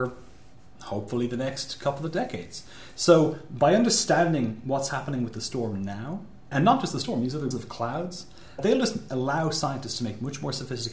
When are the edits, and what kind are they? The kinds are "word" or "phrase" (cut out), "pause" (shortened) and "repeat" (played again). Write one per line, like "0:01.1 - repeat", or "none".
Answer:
0:06.5 - word
0:07.5 - word
0:08.6 - word